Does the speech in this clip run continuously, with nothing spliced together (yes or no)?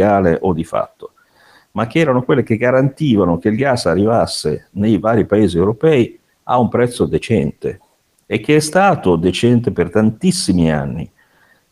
yes